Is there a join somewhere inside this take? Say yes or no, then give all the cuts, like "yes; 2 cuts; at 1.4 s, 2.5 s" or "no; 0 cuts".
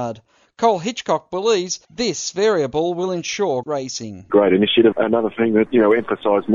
yes; 4 cuts; at 1.8 s, 3.6 s, 4.3 s, 4.9 s